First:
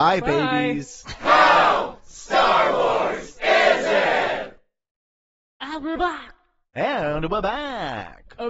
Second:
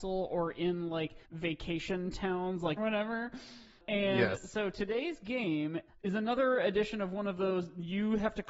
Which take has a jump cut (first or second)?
second